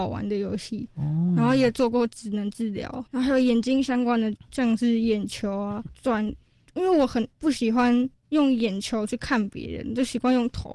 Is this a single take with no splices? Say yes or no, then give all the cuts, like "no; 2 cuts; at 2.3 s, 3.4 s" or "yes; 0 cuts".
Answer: no; 2 cuts; at 3.1 s, 7.3 s